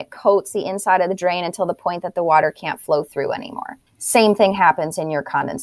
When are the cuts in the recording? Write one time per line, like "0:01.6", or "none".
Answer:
0:03.9